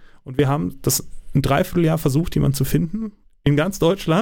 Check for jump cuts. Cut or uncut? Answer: uncut